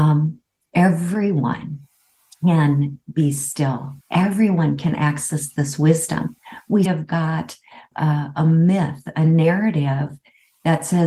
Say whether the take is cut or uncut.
cut